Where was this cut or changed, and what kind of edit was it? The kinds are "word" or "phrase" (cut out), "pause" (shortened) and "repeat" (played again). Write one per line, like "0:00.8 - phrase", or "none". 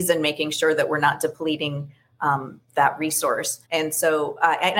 0:03.6 - pause